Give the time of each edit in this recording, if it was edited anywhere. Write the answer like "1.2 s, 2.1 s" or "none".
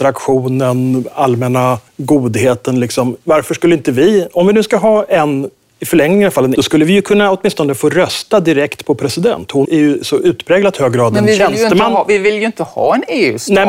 1.9 s, 5.6 s, 6.6 s, 9.7 s